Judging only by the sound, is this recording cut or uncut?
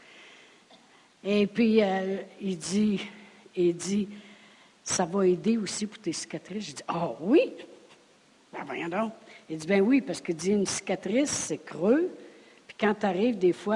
uncut